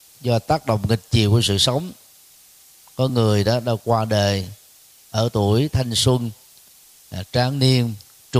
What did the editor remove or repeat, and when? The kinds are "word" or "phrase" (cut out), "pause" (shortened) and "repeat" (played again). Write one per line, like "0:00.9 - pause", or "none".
none